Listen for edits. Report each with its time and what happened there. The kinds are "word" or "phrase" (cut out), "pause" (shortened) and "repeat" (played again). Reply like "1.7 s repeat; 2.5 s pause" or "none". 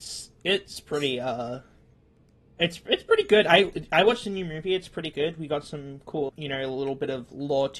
6.3 s word